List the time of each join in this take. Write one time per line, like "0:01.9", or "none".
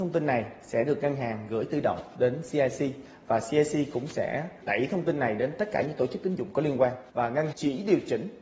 0:07.1
0:07.5